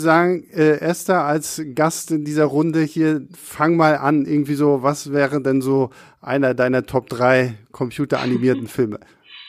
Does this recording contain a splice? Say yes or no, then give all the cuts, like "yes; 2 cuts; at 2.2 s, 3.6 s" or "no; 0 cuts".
no; 0 cuts